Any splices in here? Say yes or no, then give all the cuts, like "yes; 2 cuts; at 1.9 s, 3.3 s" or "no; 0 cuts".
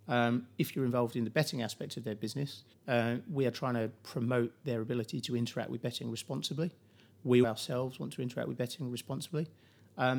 yes; 2 cuts; at 2.7 s, 7.4 s